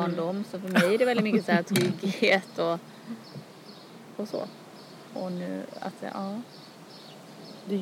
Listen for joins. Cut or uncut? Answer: uncut